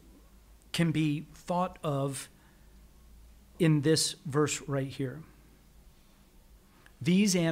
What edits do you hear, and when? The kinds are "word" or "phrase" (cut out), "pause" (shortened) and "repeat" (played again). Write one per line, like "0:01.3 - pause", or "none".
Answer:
none